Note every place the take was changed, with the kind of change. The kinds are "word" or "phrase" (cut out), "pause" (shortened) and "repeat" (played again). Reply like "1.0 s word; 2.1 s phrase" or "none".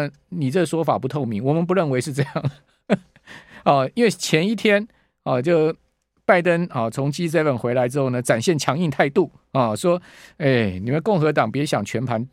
none